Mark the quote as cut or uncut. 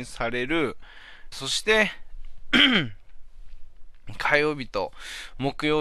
cut